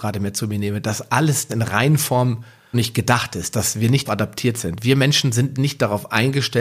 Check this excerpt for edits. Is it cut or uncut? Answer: cut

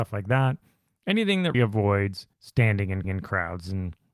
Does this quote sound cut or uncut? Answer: cut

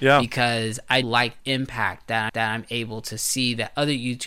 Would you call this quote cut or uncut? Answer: cut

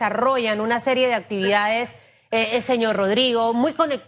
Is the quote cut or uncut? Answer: uncut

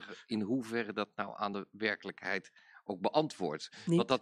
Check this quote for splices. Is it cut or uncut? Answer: uncut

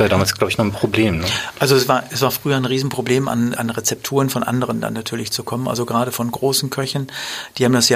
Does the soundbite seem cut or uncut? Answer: cut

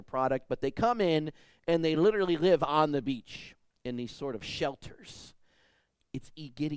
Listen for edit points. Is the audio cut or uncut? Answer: uncut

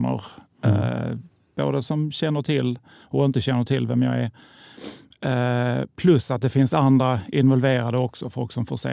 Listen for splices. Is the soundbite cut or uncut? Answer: uncut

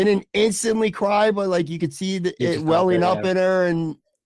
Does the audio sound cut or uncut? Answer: uncut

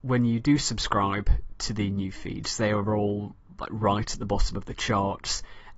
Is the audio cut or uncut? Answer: uncut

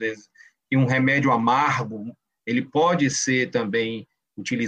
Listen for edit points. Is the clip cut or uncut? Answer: uncut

